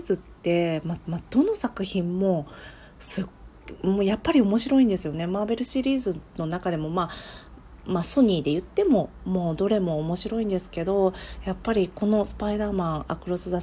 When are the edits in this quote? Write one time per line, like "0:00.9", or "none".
0:01.0